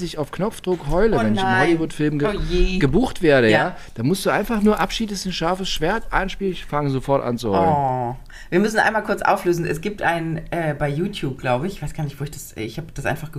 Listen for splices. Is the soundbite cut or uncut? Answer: uncut